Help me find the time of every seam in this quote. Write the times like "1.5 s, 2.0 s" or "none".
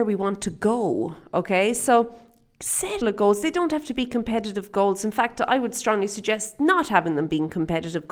3.0 s